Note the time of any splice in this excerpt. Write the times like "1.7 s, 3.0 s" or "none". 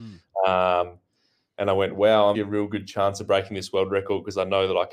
2.3 s